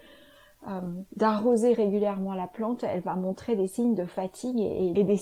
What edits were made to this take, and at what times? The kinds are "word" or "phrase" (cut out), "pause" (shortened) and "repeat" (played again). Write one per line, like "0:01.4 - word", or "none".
0:01.1 - pause

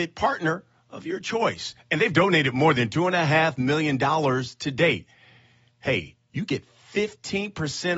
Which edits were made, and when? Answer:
none

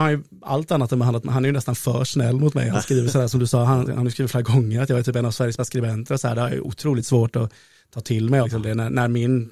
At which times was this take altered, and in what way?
0:03.9 - word
0:05.6 - word
0:08.4 - word

